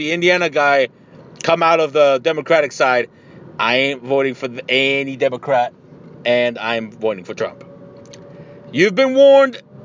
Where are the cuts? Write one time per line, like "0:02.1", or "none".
0:06.1